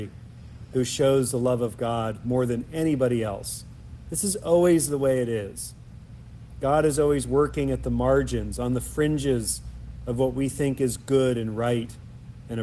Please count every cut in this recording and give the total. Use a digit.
0